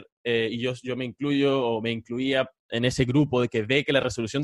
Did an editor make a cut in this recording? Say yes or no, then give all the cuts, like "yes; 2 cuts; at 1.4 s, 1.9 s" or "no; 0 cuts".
no; 0 cuts